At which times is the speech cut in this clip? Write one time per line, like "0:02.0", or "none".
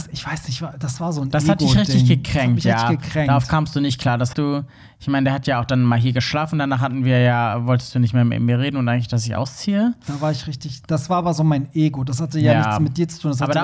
0:04.3